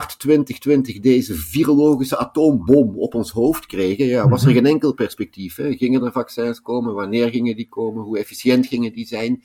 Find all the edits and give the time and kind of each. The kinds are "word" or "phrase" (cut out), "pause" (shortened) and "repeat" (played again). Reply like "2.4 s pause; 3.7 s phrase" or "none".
none